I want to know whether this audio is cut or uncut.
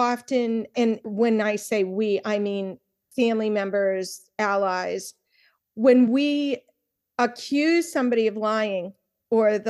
uncut